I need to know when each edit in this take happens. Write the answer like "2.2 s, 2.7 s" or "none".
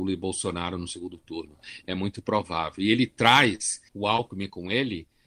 3.9 s